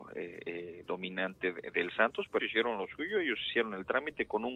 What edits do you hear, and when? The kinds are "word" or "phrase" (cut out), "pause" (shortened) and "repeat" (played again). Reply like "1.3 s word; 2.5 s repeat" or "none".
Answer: 2.4 s word

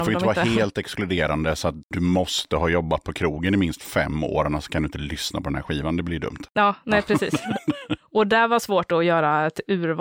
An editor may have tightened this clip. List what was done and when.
none

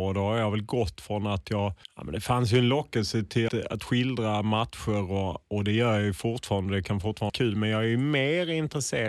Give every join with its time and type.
1.8 s pause; 3.5 s word; 5.4 s pause; 7.3 s word

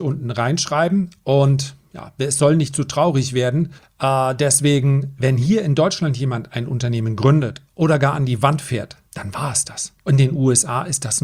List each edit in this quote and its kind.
3.8 s pause; 9.0 s pause; 10.0 s pause

